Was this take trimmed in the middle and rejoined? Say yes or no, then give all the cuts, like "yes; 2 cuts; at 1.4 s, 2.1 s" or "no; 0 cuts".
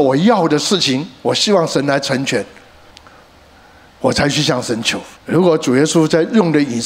yes; 2 cuts; at 2.9 s, 5.2 s